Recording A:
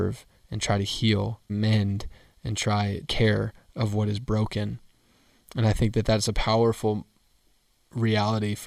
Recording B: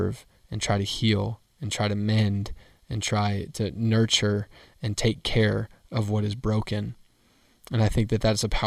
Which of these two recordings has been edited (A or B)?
A